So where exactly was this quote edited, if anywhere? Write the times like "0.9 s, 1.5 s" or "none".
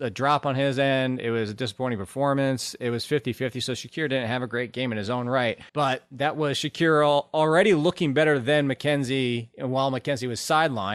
5.7 s